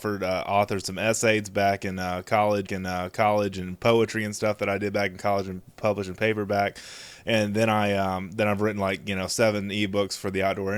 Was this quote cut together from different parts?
yes; 1 cut; at 2.7 s

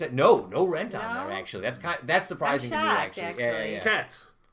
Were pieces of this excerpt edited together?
no; 0 cuts

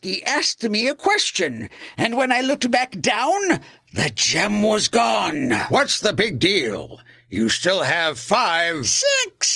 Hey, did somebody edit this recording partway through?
no; 0 cuts

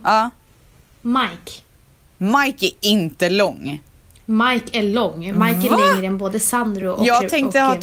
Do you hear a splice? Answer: no; 0 cuts

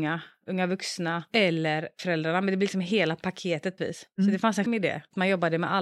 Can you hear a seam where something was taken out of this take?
yes; 2 cuts; at 3.8 s, 4.7 s

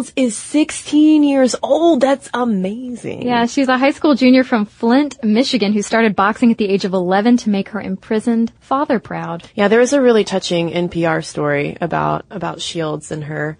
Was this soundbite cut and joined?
yes; 3 cuts; at 8.6 s, 9.5 s, 12.3 s

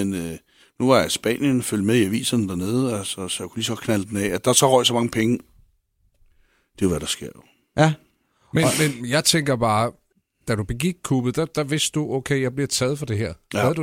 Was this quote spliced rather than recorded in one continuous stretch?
no; 0 cuts

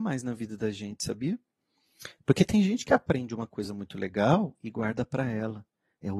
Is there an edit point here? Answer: no; 0 cuts

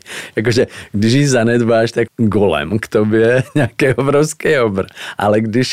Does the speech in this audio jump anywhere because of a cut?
yes; 1 cut; at 2.1 s

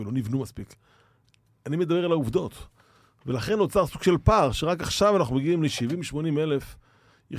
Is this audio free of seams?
yes; 0 cuts

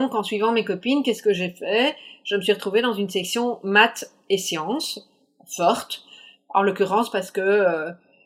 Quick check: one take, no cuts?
yes; 0 cuts

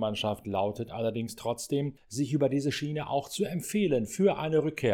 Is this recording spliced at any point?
no; 0 cuts

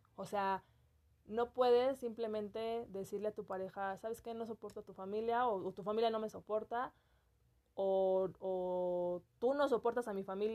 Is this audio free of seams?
yes; 0 cuts

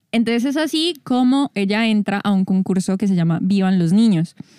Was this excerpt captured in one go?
yes; 0 cuts

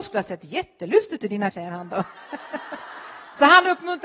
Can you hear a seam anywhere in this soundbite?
yes; 2 cuts; at 1.2 s, 1.5 s

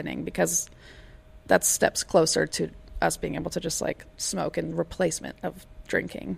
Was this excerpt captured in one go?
yes; 0 cuts

